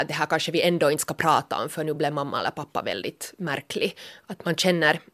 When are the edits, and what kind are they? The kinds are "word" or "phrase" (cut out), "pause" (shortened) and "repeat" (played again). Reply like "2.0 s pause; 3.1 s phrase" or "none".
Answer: none